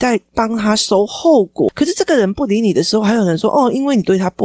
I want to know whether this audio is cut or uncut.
uncut